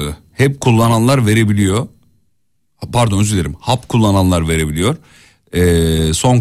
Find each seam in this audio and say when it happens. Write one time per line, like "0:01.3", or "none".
none